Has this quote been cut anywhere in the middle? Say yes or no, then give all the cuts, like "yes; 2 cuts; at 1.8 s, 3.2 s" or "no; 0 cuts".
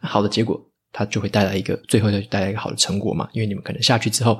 yes; 1 cut; at 1.8 s